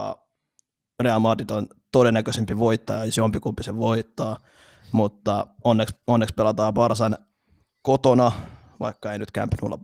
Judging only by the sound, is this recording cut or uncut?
uncut